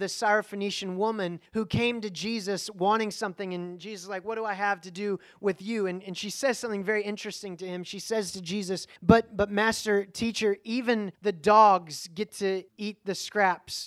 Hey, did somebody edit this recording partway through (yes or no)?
yes